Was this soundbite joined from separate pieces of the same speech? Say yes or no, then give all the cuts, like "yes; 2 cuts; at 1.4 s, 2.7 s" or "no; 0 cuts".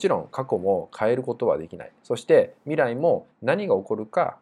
yes; 1 cut; at 3.3 s